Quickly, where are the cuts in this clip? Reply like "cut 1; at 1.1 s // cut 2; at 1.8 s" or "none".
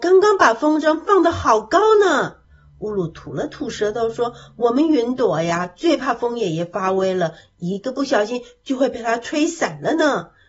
cut 1; at 2.4 s